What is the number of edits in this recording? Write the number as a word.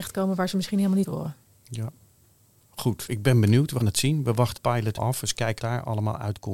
six